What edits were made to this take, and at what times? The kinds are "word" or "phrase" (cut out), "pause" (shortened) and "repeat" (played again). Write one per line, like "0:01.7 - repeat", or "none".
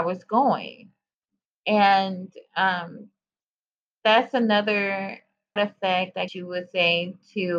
0:05.6 - word
0:06.3 - word